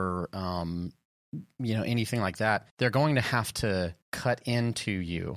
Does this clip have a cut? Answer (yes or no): yes